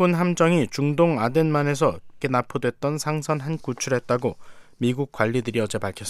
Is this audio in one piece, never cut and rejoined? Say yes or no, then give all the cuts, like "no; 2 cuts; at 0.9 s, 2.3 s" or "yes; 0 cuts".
no; 2 cuts; at 2.2 s, 3.6 s